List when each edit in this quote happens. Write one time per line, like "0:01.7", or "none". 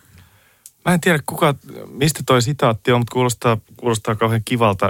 none